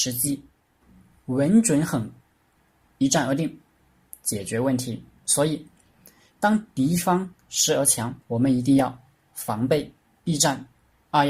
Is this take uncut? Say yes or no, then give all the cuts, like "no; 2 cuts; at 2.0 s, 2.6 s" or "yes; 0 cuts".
no; 1 cut; at 8.2 s